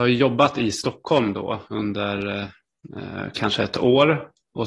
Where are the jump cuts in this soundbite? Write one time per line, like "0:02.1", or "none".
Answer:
none